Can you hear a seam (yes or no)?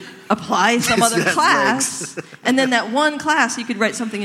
no